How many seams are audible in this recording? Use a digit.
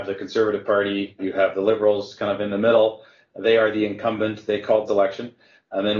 2